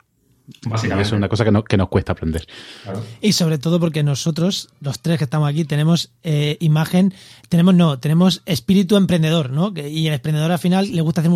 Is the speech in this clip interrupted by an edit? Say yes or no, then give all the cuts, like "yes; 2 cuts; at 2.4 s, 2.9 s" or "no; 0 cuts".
no; 0 cuts